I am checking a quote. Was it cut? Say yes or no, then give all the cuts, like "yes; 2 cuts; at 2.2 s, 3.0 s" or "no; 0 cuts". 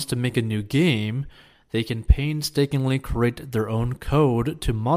no; 0 cuts